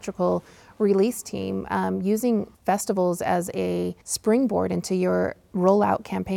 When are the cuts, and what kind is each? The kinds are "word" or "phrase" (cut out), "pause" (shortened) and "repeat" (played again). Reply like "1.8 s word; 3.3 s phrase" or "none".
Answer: 2.5 s pause; 4.0 s pause